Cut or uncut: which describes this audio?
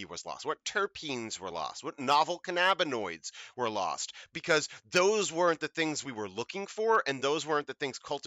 uncut